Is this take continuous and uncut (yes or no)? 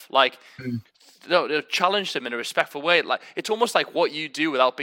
yes